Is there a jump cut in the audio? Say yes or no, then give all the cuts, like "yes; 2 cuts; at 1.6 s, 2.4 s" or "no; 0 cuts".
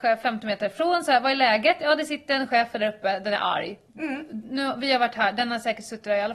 no; 0 cuts